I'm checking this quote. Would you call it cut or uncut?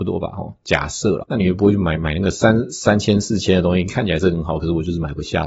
cut